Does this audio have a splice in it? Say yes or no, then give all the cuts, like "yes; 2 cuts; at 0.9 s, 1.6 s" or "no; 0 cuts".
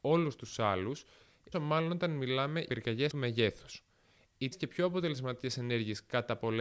yes; 4 cuts; at 1.5 s, 2.7 s, 3.1 s, 4.5 s